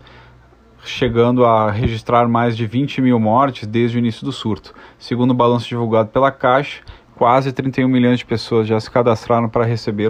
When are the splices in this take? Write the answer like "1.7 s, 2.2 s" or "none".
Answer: none